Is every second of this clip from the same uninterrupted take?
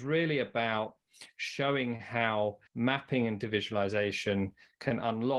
no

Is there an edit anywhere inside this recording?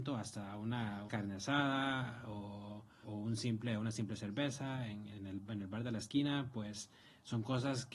yes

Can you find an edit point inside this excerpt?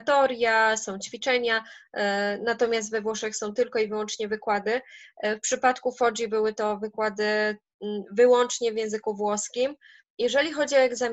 no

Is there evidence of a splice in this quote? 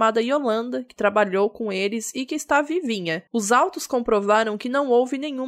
yes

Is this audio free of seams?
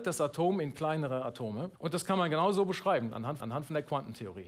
no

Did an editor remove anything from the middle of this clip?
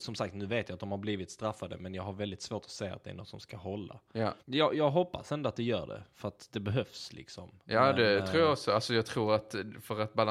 yes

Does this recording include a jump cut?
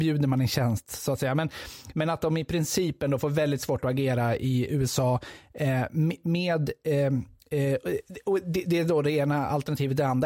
no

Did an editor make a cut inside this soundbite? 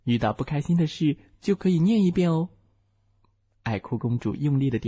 no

